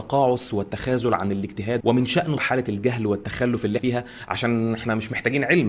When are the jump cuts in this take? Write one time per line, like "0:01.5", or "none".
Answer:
0:01.8
0:02.4
0:03.8

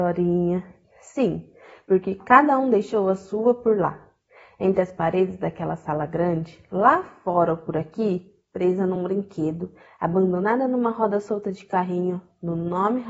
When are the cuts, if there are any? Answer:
none

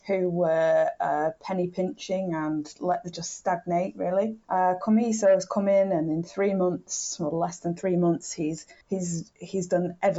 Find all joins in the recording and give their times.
0:03.1
0:04.4
0:08.8

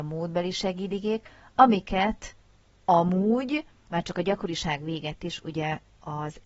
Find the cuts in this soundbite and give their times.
none

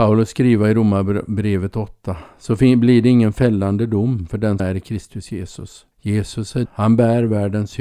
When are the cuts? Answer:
0:04.6
0:05.9
0:06.7

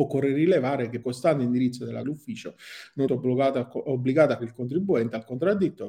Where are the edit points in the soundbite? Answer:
0:01.0
0:02.0
0:03.1
0:04.4

